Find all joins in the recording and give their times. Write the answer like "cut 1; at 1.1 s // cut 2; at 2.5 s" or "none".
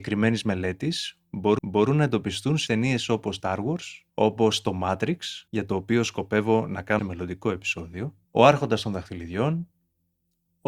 cut 1; at 1.6 s // cut 2; at 2.7 s // cut 3; at 3.4 s // cut 4; at 4.1 s // cut 5; at 5.5 s // cut 6; at 7.0 s // cut 7; at 8.3 s